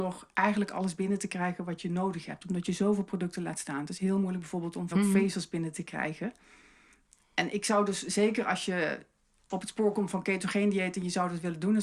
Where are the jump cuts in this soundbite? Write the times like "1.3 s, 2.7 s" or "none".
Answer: 4.9 s